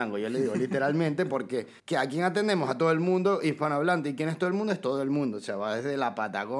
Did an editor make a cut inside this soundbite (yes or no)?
yes